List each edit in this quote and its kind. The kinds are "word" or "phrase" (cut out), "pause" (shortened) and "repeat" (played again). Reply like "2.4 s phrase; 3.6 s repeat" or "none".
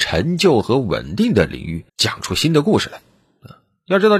1.9 s pause

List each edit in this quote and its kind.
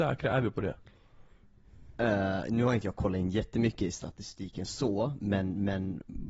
none

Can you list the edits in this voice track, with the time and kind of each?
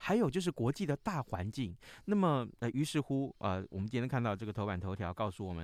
none

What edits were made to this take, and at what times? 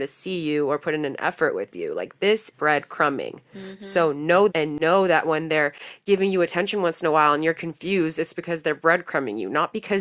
2.5 s word; 4.5 s word

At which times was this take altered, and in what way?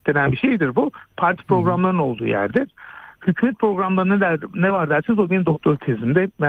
none

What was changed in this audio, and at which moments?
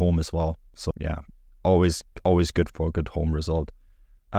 0.9 s word; 2.7 s word

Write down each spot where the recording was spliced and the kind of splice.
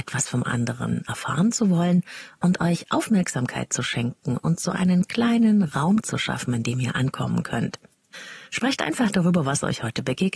8.5 s pause

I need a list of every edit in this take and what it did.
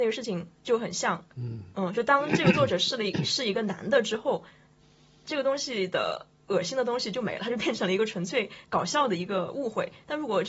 none

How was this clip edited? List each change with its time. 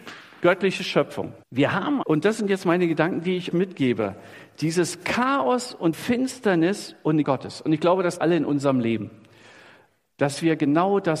1.4 s pause; 2.0 s word; 3.5 s word; 5.9 s word; 7.2 s word; 8.2 s phrase

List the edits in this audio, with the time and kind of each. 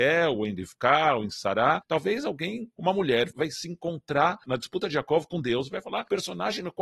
3.3 s word

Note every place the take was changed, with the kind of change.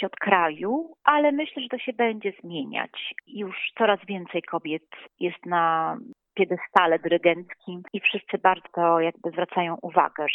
1.0 s pause; 8.6 s word

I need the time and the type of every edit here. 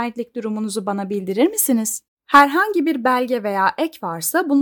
2.1 s pause

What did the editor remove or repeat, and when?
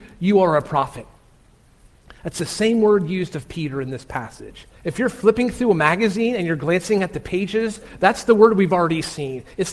4.8 s pause

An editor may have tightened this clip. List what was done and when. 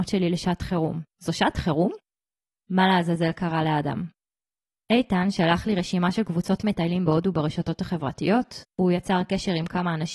1.1 s pause; 8.7 s pause

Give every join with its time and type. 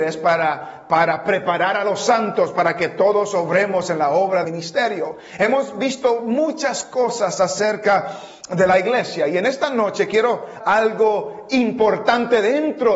4.4 s word; 10.6 s word

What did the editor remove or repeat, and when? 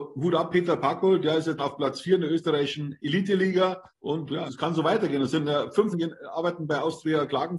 1.6 s word; 3.9 s pause; 4.5 s word; 5.9 s word

